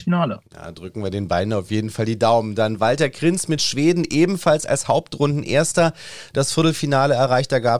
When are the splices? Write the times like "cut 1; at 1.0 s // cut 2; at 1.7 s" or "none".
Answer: none